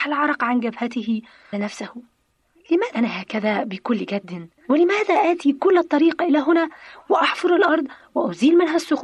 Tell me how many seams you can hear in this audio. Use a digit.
3